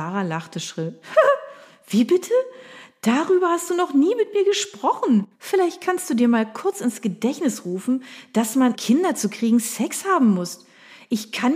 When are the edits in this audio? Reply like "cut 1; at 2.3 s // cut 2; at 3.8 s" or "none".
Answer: cut 1; at 5.3 s // cut 2; at 8.7 s